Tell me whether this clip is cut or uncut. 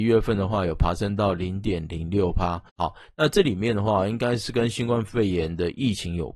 cut